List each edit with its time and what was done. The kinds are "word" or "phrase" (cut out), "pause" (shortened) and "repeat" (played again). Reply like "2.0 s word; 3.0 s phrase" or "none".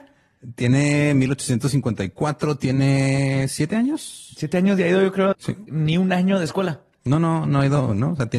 5.3 s word